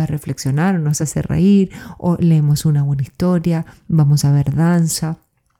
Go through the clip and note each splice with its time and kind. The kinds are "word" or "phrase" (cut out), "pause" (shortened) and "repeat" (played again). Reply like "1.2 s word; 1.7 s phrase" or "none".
none